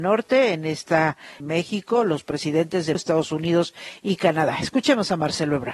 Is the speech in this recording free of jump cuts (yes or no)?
no